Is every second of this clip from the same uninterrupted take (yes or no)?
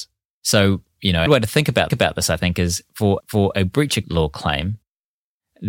no